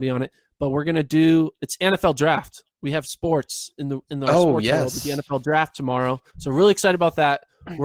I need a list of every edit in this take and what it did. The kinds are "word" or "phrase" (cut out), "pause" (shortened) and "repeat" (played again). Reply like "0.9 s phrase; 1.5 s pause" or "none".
6.3 s pause